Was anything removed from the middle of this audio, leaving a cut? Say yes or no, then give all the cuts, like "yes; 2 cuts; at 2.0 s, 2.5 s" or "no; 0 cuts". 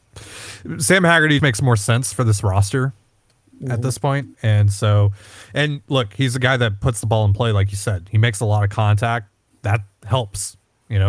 yes; 1 cut; at 1.4 s